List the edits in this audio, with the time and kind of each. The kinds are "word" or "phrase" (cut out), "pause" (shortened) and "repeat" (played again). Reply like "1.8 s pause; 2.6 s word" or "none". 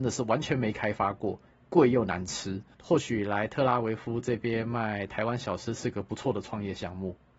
none